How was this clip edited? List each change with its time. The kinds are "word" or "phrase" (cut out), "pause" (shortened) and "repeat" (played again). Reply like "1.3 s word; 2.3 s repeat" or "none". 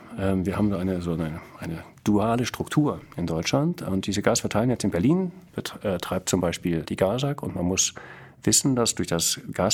6.8 s word

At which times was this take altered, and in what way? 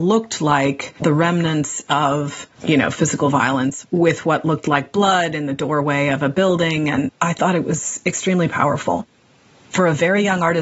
1.0 s pause; 2.5 s pause

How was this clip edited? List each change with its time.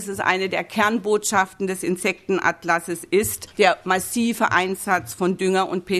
3.5 s pause

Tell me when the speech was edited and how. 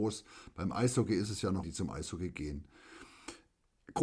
1.6 s word

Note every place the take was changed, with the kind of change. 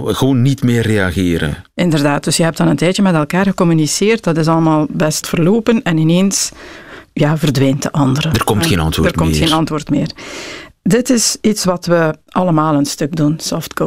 5.2 s word

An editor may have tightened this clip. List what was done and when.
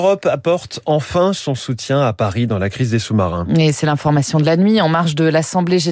none

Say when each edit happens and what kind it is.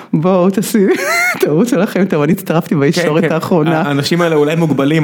none

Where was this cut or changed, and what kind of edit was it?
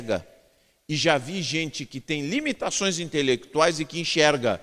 none

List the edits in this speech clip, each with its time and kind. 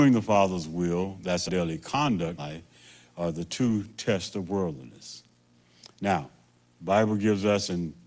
1.5 s word; 2.4 s word

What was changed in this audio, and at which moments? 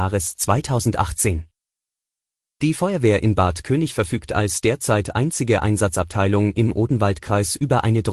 none

